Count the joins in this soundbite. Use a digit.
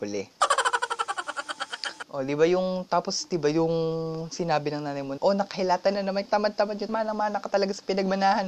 3